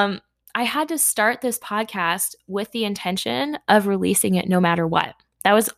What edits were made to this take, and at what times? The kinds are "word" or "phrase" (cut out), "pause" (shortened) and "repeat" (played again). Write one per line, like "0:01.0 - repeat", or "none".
none